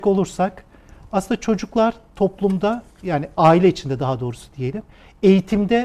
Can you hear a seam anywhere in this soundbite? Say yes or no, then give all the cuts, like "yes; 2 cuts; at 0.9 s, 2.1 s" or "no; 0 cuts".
no; 0 cuts